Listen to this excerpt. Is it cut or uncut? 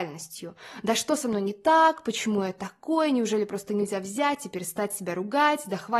uncut